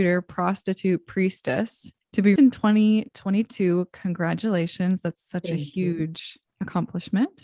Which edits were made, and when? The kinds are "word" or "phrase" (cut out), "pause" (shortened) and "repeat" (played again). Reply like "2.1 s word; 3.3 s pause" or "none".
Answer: 2.0 s pause; 2.4 s word